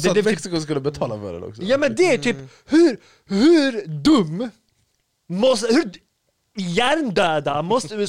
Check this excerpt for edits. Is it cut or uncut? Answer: uncut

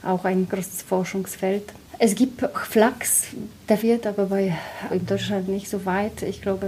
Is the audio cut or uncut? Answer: cut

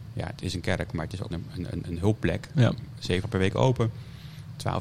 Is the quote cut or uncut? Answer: cut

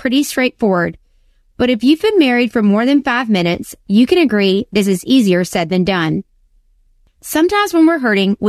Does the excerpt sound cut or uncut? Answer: uncut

